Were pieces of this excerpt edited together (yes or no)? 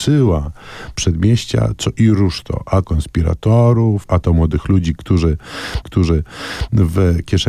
yes